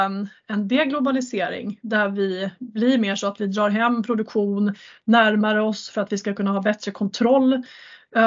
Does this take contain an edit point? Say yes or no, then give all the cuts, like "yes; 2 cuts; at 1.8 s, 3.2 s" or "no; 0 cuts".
no; 0 cuts